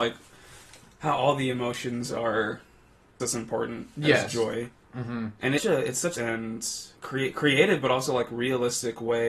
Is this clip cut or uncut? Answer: cut